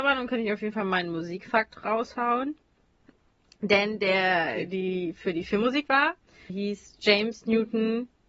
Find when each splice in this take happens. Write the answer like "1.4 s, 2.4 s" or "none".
5.9 s, 6.5 s